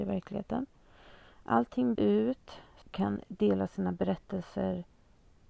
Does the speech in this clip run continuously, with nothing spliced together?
no; 2 cuts; at 2.0 s, 2.8 s

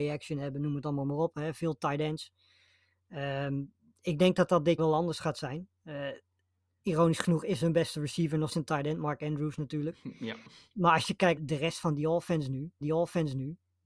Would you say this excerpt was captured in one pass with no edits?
no; 4 cuts; at 4.8 s, 8.5 s, 11.4 s, 12.8 s

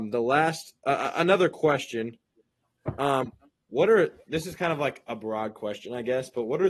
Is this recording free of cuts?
yes; 0 cuts

